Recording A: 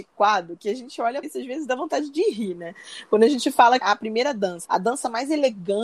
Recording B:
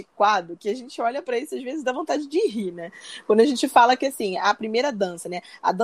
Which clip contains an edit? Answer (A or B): A